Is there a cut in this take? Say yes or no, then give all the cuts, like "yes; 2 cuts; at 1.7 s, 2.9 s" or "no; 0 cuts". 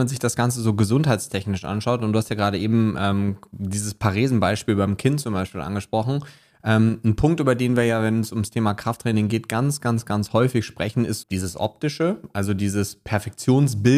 yes; 1 cut; at 11.2 s